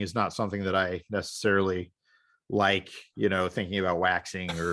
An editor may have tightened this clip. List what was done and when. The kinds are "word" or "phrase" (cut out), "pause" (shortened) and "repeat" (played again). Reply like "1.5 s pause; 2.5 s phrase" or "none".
none

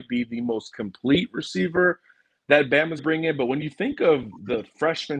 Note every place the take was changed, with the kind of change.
3.0 s word

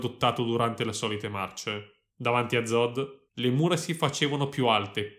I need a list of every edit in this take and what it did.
2.1 s pause; 3.3 s pause

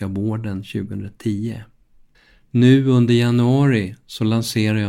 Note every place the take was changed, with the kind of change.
2.1 s pause

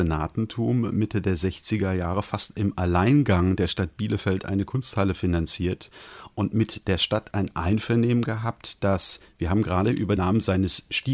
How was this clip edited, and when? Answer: 10.2 s word

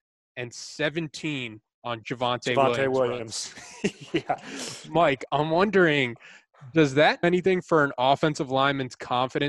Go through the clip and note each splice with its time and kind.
2.0 s word; 7.2 s word

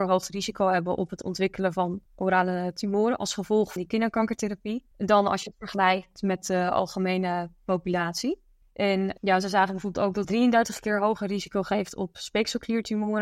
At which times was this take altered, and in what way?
2.1 s pause; 3.8 s word; 4.9 s pause; 8.6 s pause; 10.2 s word

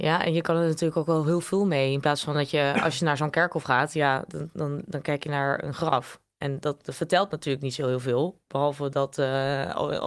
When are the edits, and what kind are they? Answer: none

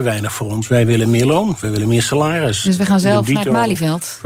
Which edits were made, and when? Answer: none

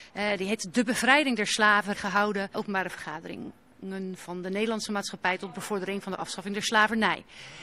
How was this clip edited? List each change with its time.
1.9 s word; 2.5 s word

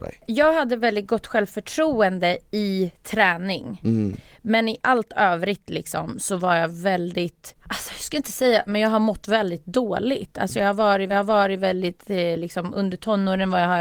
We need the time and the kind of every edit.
8.7 s word; 11.1 s repeat

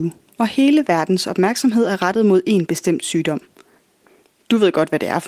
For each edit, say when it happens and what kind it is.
none

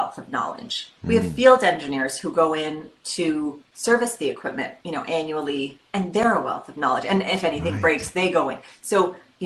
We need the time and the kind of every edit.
1.0 s pause; 4.8 s pause; 5.9 s pause

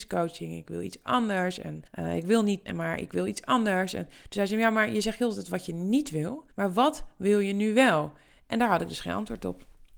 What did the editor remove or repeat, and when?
1.9 s pause; 2.7 s word; 6.5 s pause

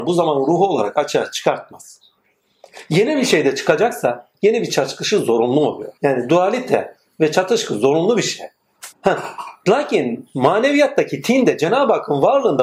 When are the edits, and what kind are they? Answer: 6.0 s pause; 8.9 s pause

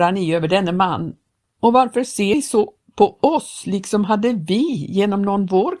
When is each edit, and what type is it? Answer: none

